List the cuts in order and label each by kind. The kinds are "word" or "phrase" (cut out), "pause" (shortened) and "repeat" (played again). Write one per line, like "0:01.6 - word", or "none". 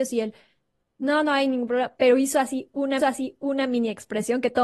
0:03.0 - repeat